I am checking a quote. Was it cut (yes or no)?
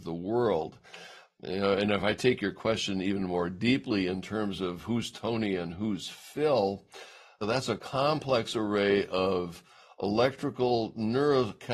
no